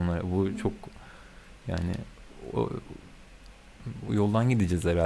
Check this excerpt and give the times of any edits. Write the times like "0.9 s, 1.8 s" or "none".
4.1 s